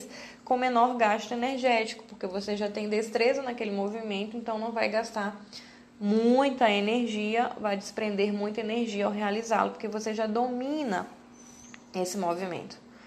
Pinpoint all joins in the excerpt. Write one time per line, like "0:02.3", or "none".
none

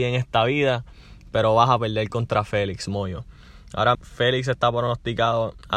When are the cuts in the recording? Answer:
0:03.9

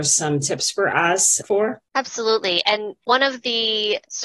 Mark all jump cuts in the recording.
0:01.4

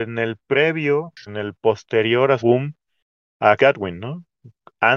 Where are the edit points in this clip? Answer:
0:01.3
0:02.4
0:03.6

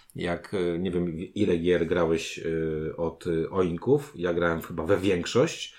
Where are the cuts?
none

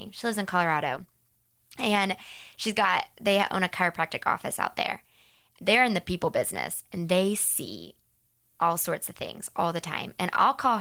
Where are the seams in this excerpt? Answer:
none

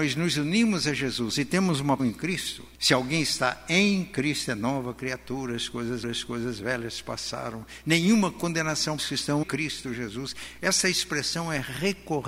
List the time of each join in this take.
0:02.0
0:02.7
0:06.0
0:09.0
0:09.4

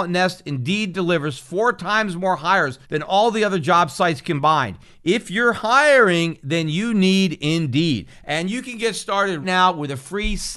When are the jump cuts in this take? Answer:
0:02.8
0:09.4

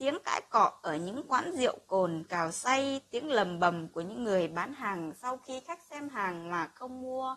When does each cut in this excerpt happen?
none

